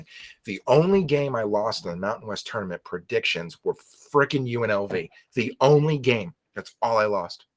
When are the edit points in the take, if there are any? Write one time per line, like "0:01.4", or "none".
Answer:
0:06.5